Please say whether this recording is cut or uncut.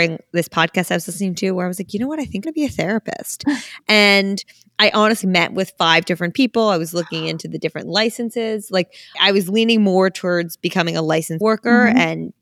cut